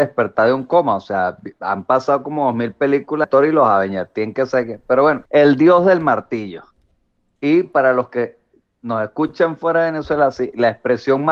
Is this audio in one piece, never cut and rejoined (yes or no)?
no